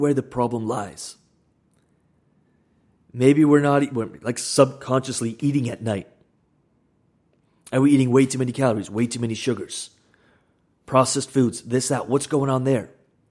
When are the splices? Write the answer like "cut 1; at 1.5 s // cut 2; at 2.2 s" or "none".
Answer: none